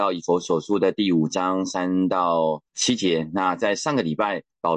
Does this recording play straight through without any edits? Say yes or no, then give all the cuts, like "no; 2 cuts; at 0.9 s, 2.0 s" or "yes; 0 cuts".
no; 1 cut; at 2.7 s